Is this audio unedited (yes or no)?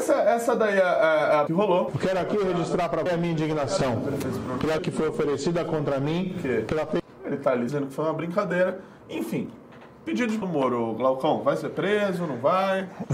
no